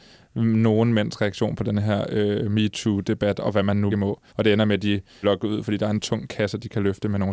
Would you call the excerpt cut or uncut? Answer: cut